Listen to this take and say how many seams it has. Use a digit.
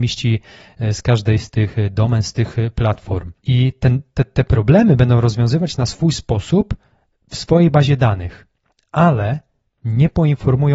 0